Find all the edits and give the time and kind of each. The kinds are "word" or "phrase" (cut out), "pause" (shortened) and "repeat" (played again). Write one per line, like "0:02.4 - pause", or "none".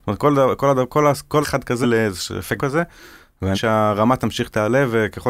0:01.4 - word
0:01.8 - word
0:02.6 - word
0:03.5 - word